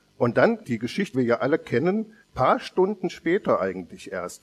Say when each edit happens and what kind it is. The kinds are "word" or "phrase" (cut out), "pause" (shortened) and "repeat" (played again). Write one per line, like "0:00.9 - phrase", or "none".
0:01.1 - word
0:02.2 - pause